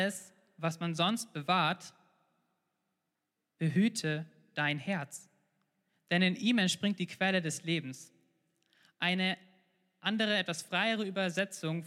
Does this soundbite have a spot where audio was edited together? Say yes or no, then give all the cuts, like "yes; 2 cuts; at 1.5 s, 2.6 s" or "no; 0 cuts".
no; 0 cuts